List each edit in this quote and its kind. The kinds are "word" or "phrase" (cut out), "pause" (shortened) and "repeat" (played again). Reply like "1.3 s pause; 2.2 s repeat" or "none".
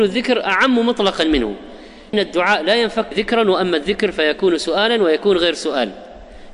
2.1 s word; 3.1 s phrase